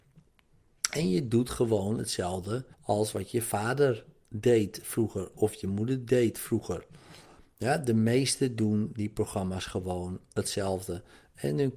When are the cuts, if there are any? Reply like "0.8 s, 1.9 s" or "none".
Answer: 2.7 s